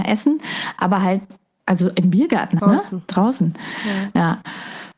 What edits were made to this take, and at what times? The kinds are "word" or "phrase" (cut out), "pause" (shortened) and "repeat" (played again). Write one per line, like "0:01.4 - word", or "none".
0:01.6 - word
0:02.6 - word